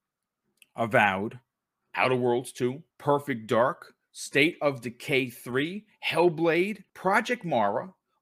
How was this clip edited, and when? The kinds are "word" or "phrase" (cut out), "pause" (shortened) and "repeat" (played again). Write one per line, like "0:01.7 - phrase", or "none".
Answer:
0:02.9 - pause
0:06.9 - pause